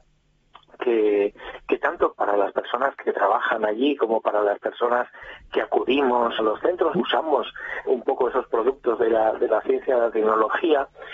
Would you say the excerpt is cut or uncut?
cut